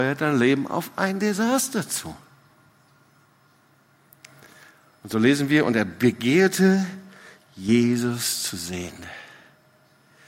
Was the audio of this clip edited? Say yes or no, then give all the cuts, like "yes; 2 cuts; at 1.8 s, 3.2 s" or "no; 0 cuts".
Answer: no; 0 cuts